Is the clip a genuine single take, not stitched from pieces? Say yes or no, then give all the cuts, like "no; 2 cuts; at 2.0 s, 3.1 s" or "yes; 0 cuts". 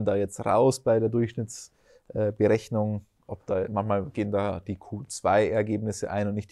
yes; 0 cuts